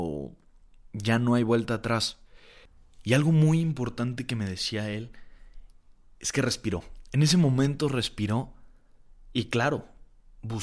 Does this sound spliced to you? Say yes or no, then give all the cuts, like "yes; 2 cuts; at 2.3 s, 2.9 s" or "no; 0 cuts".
no; 0 cuts